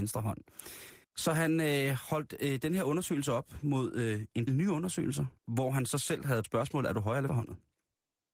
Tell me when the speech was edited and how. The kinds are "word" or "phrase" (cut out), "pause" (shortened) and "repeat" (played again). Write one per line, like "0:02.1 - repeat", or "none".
0:01.0 - pause
0:04.5 - word
0:05.4 - pause
0:06.4 - word
0:07.3 - word